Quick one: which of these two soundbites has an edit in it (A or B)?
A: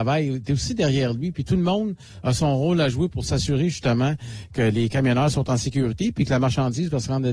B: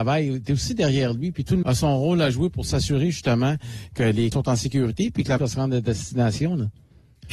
B